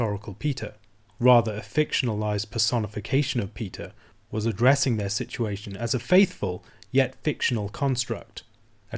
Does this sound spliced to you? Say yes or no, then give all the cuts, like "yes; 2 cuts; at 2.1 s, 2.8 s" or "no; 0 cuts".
no; 0 cuts